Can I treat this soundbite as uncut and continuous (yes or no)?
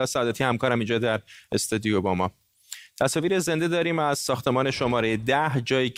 yes